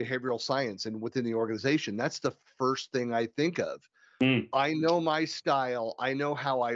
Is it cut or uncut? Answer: uncut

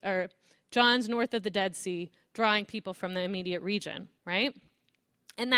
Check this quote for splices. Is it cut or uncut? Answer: cut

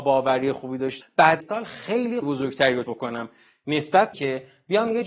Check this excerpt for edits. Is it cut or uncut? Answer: cut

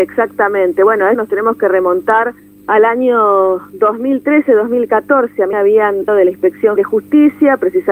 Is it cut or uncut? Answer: cut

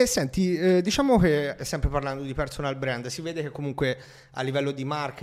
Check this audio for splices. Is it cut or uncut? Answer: uncut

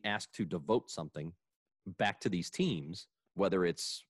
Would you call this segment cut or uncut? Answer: uncut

